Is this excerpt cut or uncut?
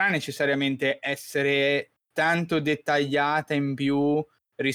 uncut